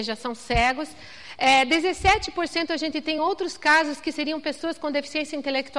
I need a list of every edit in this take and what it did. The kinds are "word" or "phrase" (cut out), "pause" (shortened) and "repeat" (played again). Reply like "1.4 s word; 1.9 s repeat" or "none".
none